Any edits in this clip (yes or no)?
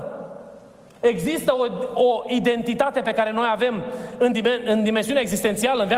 no